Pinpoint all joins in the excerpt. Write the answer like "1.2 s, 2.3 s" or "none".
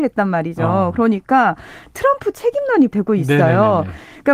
2.9 s